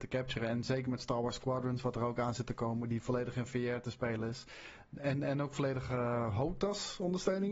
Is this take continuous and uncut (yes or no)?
yes